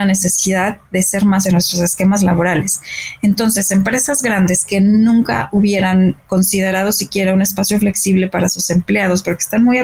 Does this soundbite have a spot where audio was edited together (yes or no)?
yes